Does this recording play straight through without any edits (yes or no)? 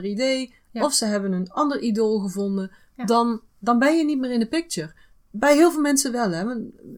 yes